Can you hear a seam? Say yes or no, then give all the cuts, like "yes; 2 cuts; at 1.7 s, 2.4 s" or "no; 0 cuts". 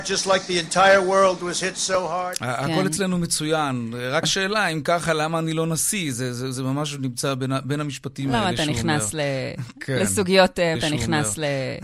yes; 2 cuts; at 4.2 s, 10.7 s